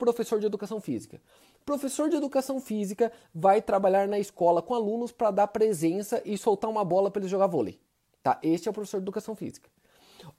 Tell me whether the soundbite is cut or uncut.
uncut